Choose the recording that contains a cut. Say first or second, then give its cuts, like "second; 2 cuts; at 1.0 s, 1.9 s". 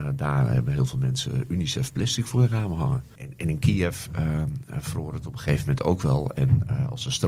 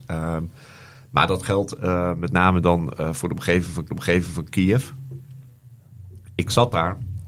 second; 1 cut; at 3.9 s